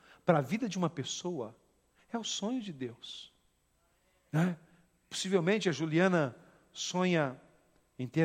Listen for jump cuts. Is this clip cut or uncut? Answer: uncut